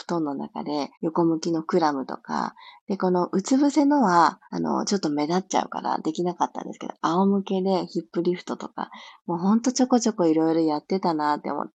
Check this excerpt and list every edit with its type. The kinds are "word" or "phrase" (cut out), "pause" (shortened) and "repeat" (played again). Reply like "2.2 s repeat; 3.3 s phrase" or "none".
0.9 s pause; 4.4 s pause